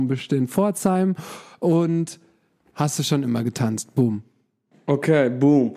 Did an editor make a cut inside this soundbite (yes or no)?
yes